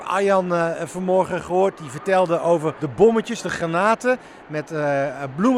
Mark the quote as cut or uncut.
uncut